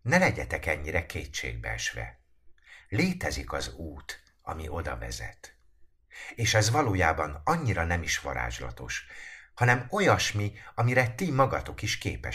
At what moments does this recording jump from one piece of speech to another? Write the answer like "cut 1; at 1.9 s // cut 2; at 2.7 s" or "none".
none